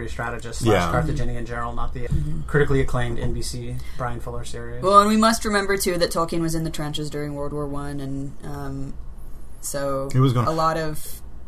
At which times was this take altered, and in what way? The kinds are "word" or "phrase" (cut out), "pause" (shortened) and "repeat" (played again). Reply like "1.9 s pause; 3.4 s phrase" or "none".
2.1 s word